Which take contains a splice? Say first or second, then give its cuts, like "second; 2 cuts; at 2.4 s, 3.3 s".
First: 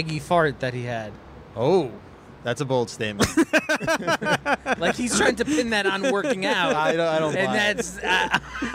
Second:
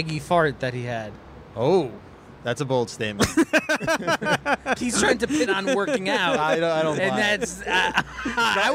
second; 2 cuts; at 4.8 s, 5.5 s